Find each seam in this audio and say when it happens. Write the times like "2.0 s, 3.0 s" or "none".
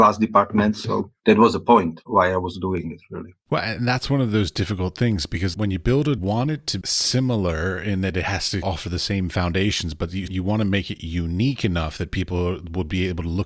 3.4 s, 5.5 s, 6.2 s, 6.8 s, 8.6 s, 10.3 s

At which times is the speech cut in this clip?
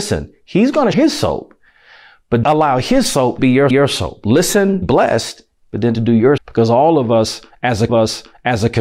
0.9 s, 2.4 s, 3.4 s, 3.7 s, 4.8 s, 5.9 s, 6.4 s, 7.9 s

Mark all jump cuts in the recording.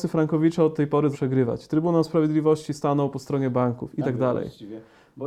1.1 s, 4.0 s

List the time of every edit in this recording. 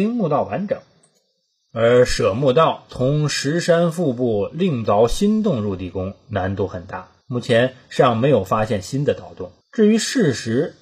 7.2 s, 9.6 s

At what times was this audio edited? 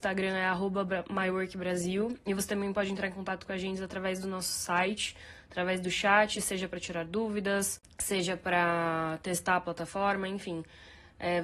none

